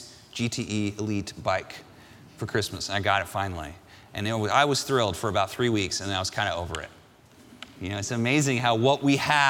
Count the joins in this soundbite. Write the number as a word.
zero